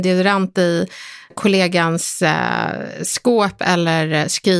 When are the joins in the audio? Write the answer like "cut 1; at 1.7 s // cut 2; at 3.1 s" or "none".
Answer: cut 1; at 1.3 s